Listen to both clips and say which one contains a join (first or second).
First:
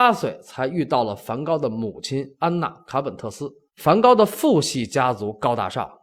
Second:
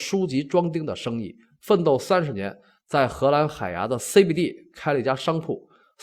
first